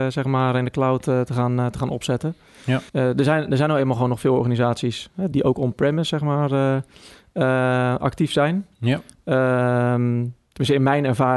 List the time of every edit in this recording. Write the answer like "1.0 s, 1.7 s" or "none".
2.9 s, 5.3 s